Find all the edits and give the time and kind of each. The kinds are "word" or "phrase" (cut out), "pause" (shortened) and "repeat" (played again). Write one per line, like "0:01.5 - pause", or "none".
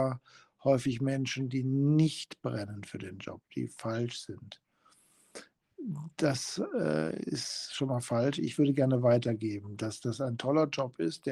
none